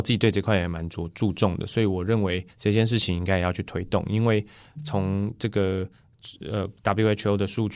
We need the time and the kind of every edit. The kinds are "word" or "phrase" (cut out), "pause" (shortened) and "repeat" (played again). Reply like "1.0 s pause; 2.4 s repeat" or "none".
2.5 s pause